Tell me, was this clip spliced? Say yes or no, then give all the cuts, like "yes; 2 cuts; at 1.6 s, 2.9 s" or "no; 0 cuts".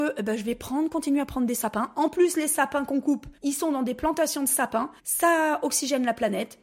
yes; 2 cuts; at 3.4 s, 5.0 s